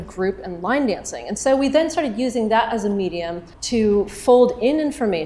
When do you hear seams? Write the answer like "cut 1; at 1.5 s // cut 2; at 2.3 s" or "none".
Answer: cut 1; at 3.5 s